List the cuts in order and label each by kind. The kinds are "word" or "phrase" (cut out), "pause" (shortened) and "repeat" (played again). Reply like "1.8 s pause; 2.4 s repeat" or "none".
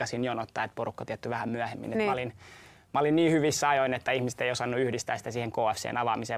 1.1 s word